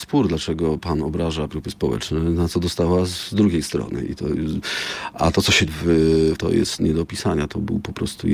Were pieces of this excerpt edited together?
yes; 3 cuts; at 1.5 s, 5.7 s, 6.4 s

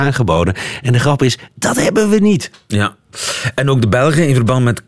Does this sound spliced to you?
no; 0 cuts

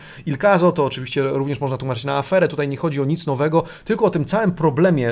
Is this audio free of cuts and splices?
yes; 0 cuts

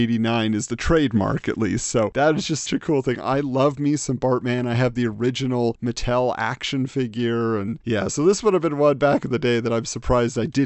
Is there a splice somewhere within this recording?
yes; 1 cut; at 2.7 s

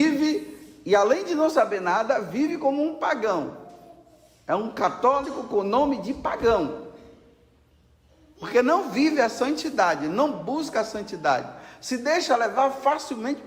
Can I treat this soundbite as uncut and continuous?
yes; 0 cuts

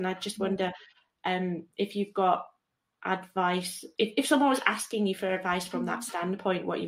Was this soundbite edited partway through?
yes; 1 cut; at 4.0 s

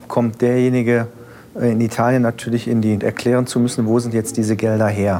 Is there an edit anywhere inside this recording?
yes; 1 cut; at 3.0 s

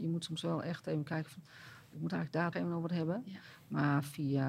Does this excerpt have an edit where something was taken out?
yes; 1 cut; at 2.5 s

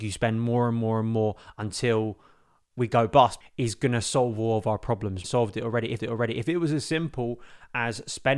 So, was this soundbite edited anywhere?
yes; 3 cuts; at 3.4 s, 5.2 s, 6.0 s

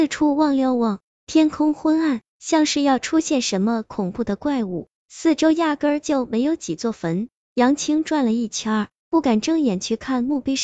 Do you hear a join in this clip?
yes; 1 cut; at 2.3 s

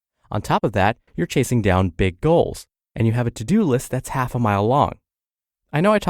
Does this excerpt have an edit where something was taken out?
yes; 1 cut; at 1.1 s

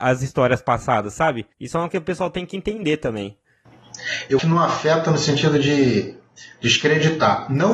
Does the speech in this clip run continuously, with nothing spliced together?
no; 3 cuts; at 1.5 s, 1.9 s, 4.4 s

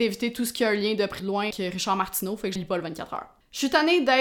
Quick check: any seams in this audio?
yes; 3 cuts; at 1.2 s, 1.5 s, 2.6 s

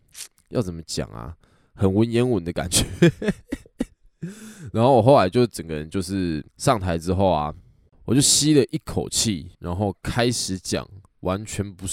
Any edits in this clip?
yes; 2 cuts; at 6.5 s, 9.5 s

